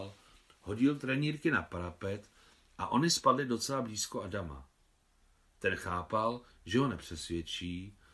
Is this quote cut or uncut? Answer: uncut